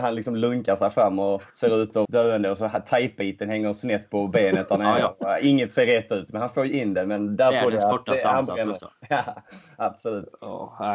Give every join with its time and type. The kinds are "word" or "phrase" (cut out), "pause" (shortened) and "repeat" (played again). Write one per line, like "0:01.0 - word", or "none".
0:01.5 - pause
0:02.0 - phrase